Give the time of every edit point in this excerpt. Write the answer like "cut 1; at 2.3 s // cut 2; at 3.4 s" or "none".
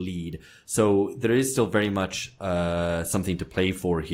none